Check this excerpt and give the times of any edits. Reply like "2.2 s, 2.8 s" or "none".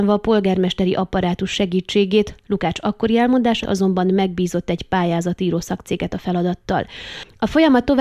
3.6 s